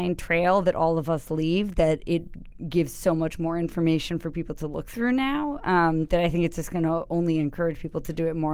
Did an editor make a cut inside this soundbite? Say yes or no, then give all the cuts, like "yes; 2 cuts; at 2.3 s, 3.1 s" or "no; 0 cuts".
no; 0 cuts